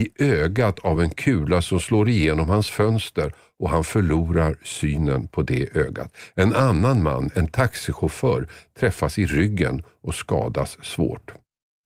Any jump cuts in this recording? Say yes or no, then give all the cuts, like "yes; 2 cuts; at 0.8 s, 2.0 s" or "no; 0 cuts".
no; 0 cuts